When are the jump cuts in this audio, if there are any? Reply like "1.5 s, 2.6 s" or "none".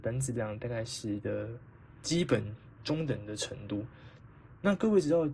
1.2 s